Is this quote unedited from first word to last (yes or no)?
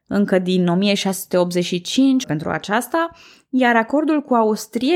no